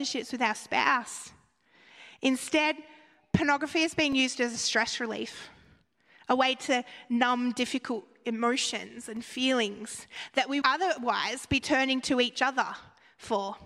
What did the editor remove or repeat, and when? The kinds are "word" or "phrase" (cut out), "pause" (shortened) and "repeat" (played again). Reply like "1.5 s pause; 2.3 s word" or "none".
10.6 s word